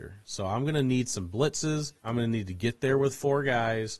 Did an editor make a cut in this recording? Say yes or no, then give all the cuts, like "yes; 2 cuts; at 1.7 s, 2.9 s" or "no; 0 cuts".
yes; 1 cut; at 2.0 s